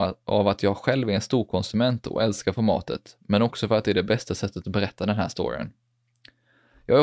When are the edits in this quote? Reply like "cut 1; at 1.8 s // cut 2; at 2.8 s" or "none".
none